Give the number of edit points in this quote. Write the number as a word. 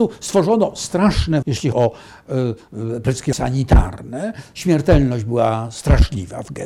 three